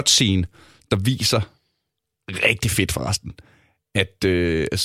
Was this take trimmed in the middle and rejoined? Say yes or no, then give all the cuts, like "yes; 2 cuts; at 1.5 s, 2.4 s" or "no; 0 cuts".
no; 0 cuts